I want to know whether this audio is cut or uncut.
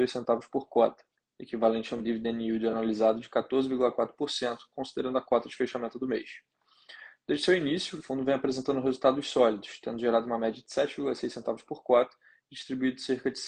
uncut